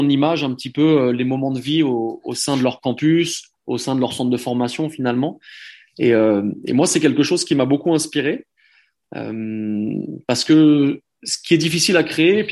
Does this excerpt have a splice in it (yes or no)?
no